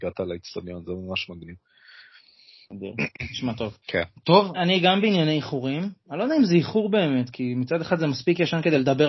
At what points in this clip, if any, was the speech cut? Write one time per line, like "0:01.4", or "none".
0:03.8
0:04.5